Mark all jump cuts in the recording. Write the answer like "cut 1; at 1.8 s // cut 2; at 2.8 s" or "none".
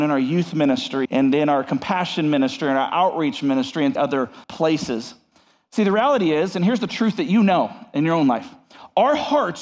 cut 1; at 1.1 s // cut 2; at 3.9 s // cut 3; at 4.4 s